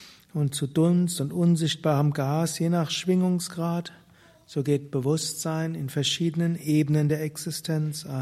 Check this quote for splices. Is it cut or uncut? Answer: uncut